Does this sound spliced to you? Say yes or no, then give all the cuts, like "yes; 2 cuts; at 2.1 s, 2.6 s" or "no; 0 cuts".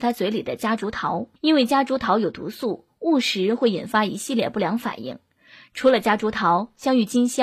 yes; 1 cut; at 1.4 s